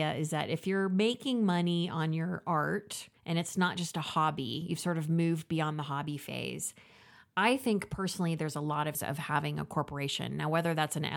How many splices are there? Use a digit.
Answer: 2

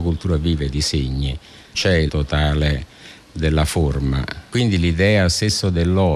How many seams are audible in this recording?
2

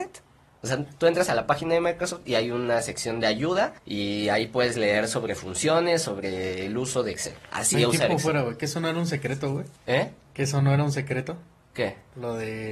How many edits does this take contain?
3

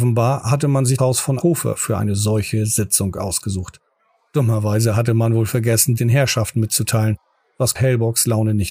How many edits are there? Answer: 4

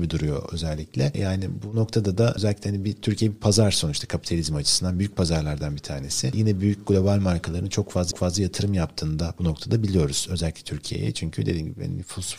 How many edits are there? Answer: 1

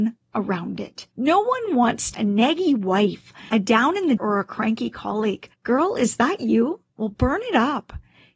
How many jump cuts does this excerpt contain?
5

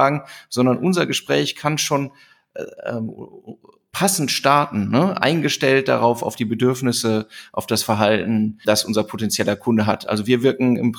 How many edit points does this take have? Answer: 1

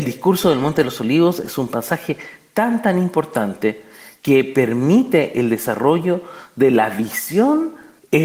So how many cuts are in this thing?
0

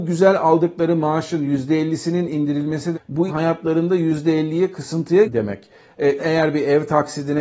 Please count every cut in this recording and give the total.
4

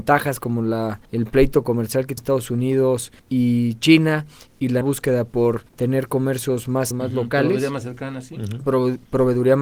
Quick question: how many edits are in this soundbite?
6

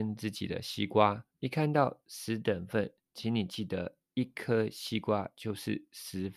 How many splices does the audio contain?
1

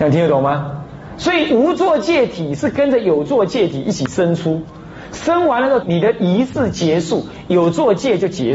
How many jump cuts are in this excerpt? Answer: 1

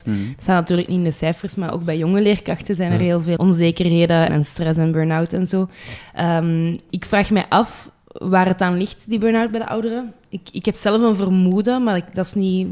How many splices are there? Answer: 3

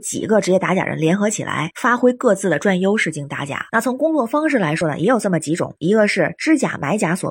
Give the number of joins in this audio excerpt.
1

